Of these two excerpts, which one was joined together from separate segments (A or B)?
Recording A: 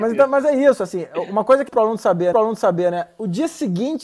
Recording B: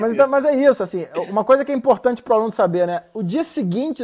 A